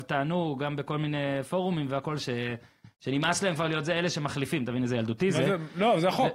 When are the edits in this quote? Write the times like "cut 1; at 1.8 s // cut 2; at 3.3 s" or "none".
none